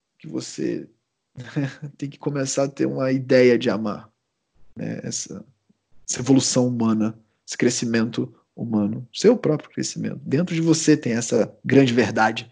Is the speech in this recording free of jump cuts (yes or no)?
yes